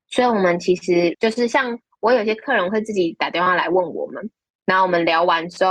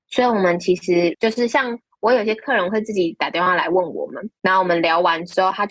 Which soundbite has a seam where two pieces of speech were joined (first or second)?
second